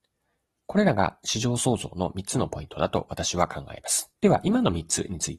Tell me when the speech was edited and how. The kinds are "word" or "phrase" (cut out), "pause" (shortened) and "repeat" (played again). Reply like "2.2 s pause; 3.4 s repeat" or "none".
4.2 s pause

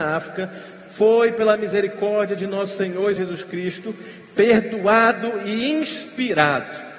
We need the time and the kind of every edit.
3.2 s word

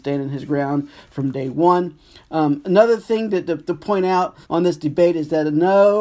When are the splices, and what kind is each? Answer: 4.4 s pause

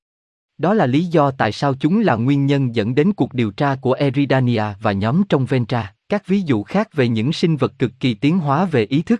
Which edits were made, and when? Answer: 6.0 s pause

